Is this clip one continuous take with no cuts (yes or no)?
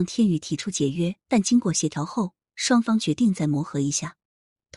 no